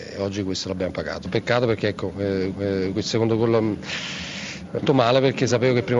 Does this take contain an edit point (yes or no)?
yes